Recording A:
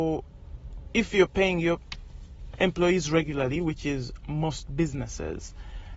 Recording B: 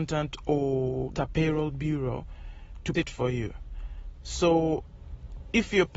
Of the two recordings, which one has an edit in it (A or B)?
B